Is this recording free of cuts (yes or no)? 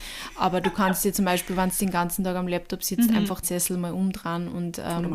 no